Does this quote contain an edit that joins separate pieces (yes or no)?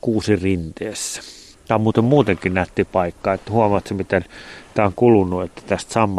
yes